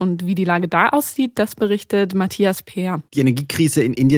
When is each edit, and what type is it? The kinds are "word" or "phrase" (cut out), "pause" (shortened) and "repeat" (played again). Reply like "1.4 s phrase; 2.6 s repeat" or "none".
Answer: 3.1 s pause

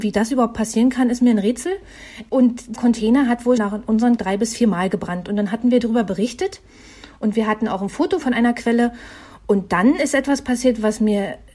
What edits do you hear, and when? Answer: 2.8 s word; 3.6 s word; 4.2 s word; 8.2 s word

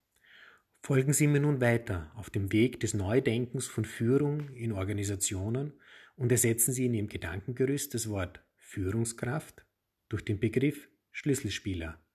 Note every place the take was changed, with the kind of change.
none

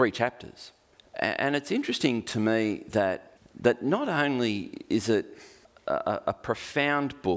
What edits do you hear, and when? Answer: none

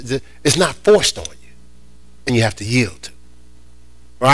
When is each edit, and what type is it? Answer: 2.3 s word

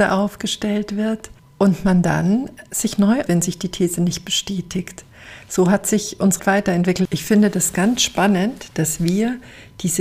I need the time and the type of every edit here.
1.4 s pause; 3.3 s word; 6.4 s word

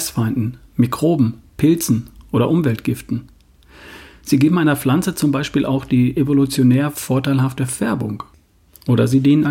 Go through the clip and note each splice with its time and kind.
none

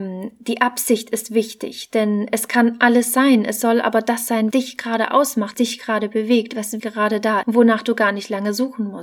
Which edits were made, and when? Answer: 4.5 s word; 5.5 s word; 6.8 s word; 7.4 s word

